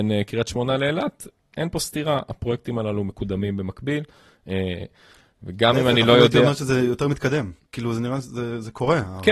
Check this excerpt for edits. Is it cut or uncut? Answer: uncut